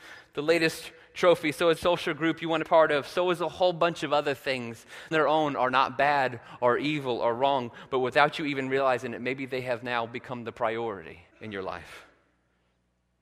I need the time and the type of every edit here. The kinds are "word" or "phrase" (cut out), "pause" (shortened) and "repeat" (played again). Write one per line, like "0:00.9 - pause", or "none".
0:01.8 - word
0:02.6 - phrase
0:05.1 - phrase
0:11.3 - pause